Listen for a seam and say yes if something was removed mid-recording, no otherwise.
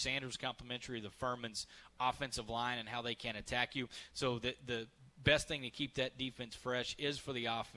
no